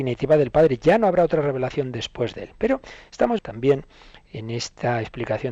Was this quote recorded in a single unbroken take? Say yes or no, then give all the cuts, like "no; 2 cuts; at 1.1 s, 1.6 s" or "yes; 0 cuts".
no; 1 cut; at 3.4 s